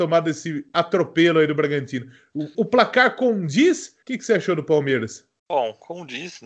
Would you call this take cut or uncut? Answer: cut